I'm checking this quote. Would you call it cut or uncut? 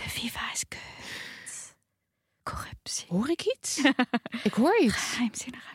uncut